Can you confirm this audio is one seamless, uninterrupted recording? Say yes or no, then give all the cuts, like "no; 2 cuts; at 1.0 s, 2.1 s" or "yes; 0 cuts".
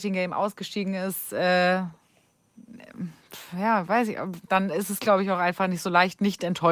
no; 1 cut; at 4.4 s